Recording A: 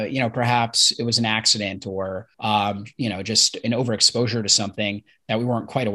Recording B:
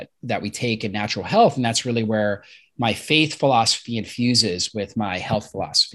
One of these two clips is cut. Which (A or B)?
A